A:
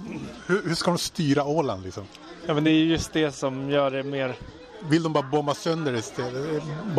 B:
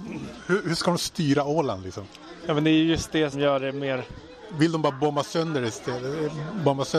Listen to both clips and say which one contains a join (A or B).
B